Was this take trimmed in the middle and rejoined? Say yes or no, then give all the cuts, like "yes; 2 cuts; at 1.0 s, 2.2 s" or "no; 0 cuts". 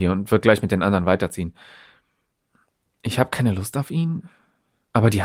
no; 0 cuts